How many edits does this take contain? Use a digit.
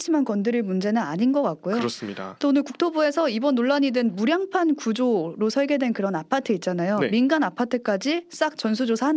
0